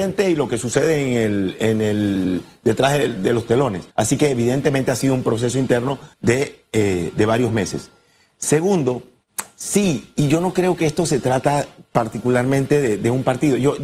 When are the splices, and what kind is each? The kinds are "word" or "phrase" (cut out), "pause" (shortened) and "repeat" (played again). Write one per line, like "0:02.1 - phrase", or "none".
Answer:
0:03.9 - pause
0:06.1 - pause